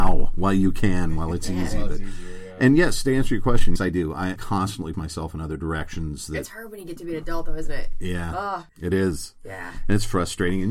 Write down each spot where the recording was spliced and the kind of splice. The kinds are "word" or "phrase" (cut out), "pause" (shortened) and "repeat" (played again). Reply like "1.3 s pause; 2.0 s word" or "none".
3.8 s word; 4.4 s word; 4.9 s word